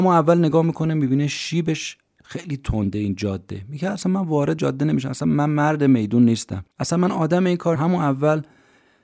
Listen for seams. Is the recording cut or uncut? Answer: cut